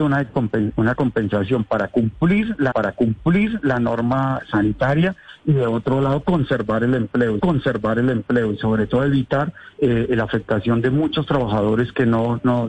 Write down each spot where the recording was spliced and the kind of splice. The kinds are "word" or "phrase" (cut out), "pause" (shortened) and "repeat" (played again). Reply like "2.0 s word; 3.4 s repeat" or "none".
2.7 s repeat; 7.4 s repeat; 9.7 s pause